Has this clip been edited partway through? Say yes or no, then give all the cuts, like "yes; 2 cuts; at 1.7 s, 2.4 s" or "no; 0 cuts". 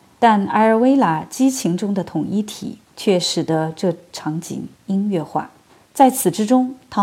yes; 3 cuts; at 2.8 s, 4.7 s, 5.7 s